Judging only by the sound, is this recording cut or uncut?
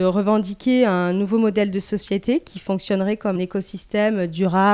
cut